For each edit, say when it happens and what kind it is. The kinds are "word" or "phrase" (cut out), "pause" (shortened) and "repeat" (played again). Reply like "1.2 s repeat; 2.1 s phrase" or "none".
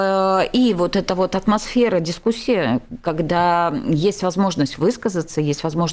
none